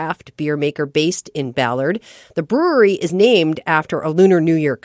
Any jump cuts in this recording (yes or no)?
no